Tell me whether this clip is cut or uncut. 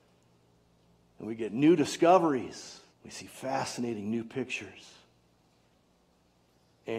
cut